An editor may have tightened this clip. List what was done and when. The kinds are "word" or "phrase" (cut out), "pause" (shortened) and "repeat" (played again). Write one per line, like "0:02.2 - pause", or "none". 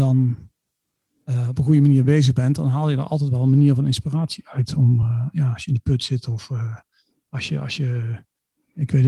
none